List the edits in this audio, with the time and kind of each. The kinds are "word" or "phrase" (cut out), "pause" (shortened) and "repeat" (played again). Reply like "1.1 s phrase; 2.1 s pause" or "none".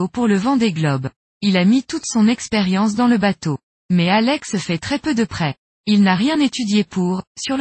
none